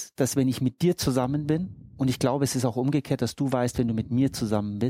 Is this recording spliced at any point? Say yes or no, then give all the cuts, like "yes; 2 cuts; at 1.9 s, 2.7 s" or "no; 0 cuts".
no; 0 cuts